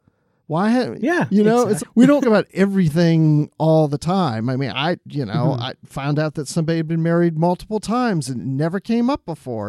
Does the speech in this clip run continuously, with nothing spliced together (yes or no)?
no